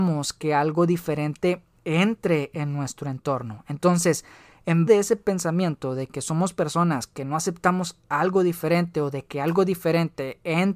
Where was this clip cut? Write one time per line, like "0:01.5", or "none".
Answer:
0:04.9